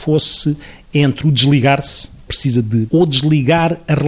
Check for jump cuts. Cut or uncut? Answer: cut